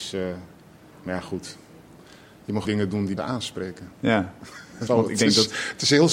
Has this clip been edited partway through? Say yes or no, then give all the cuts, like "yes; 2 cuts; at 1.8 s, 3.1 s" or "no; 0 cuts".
yes; 3 cuts; at 2.7 s, 3.2 s, 4.9 s